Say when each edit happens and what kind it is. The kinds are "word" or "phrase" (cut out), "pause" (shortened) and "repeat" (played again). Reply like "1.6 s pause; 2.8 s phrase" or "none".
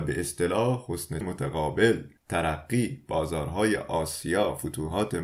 1.2 s word; 2.2 s pause